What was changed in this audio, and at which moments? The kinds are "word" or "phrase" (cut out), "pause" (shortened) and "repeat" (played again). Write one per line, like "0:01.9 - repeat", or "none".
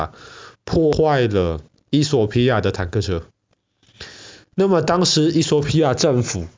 none